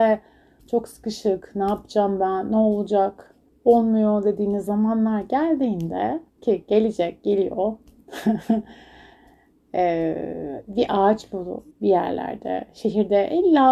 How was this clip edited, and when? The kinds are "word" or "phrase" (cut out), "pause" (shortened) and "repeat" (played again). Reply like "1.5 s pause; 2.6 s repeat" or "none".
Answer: 3.5 s pause; 6.3 s pause; 11.7 s pause